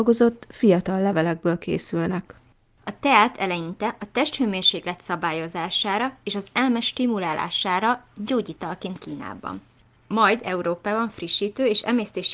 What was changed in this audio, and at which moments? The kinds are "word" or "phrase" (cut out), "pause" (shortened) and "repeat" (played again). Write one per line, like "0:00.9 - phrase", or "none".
0:09.0 - word